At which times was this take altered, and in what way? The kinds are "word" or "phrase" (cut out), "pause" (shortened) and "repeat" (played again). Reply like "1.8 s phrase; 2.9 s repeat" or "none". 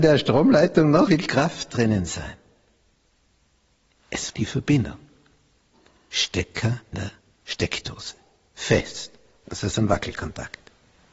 1.1 s word; 4.3 s word; 6.9 s word